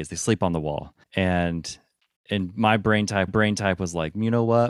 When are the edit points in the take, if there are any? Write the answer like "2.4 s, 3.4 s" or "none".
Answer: 1.0 s, 3.3 s